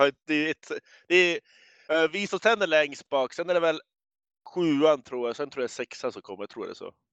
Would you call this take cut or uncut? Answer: uncut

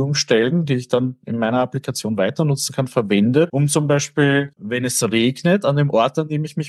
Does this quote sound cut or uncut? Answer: cut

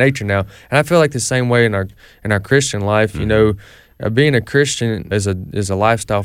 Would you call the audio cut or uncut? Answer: cut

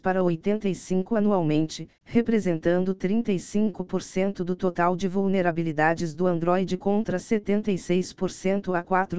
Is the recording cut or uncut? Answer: uncut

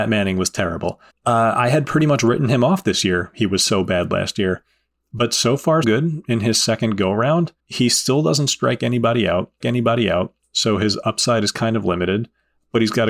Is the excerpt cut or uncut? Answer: cut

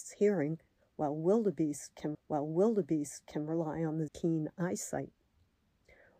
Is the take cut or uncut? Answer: cut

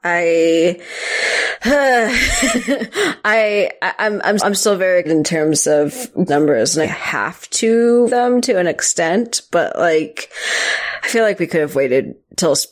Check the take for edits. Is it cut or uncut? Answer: cut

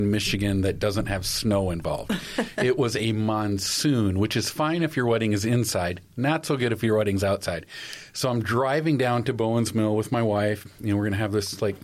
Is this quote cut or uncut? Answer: uncut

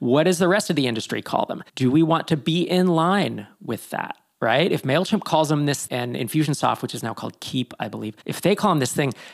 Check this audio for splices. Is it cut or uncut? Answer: cut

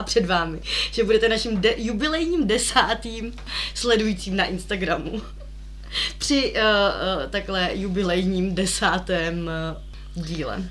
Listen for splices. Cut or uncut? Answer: uncut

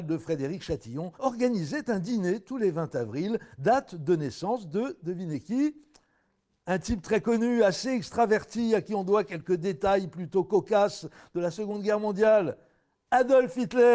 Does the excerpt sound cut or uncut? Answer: cut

